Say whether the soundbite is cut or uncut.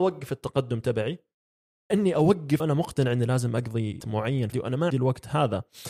cut